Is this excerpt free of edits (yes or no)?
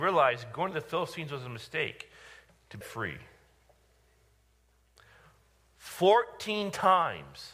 no